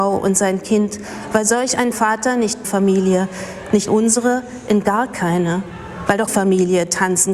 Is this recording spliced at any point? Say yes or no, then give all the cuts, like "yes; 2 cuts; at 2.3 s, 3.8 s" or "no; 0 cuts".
yes; 4 cuts; at 1.9 s, 2.6 s, 3.9 s, 6.3 s